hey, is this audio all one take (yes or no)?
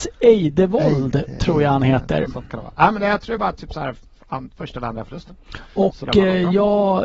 yes